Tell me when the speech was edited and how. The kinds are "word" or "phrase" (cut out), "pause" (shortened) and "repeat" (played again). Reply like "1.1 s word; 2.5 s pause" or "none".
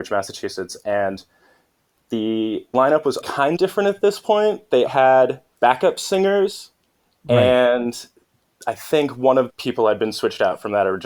2.7 s word; 3.2 s word; 3.6 s word; 4.9 s word; 5.5 s word; 9.5 s word